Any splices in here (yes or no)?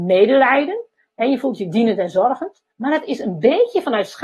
yes